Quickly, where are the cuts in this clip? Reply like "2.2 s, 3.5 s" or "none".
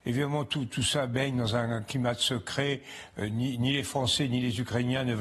none